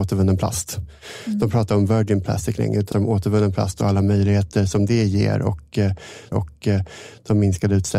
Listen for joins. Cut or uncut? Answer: cut